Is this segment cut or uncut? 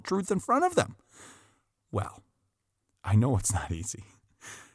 uncut